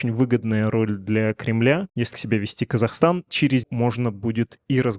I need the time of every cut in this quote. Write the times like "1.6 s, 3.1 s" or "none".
2.1 s, 3.6 s